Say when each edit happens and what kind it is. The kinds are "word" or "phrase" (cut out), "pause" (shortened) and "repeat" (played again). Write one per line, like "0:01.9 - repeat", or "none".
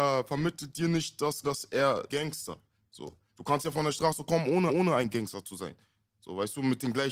0:01.4 - word
0:02.1 - phrase
0:04.7 - repeat